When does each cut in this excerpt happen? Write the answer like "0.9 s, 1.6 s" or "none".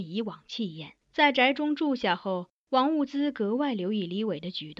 1.0 s